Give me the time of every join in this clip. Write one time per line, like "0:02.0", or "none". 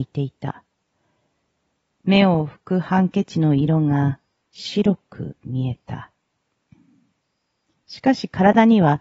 none